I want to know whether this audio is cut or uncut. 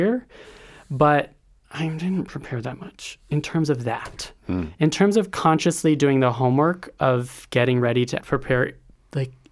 cut